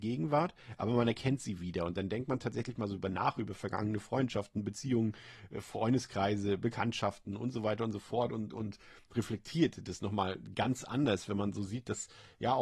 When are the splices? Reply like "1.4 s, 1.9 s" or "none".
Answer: none